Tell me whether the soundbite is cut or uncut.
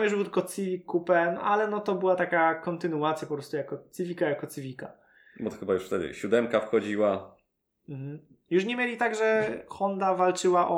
uncut